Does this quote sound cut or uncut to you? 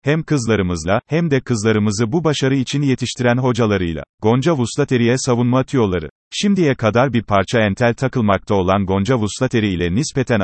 cut